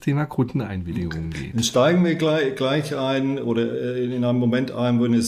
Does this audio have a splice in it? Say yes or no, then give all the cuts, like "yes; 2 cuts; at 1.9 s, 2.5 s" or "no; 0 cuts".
no; 0 cuts